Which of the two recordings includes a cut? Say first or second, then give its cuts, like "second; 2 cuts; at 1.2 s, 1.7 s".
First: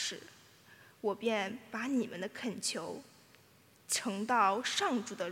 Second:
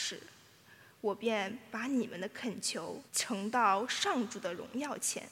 second; 1 cut; at 3.1 s